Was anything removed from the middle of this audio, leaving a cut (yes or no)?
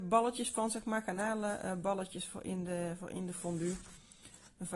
no